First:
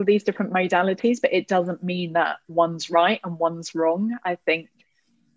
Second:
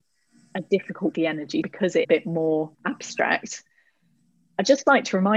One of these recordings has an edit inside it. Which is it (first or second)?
second